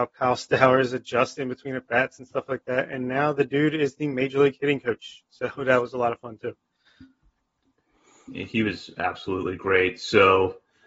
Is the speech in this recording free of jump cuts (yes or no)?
yes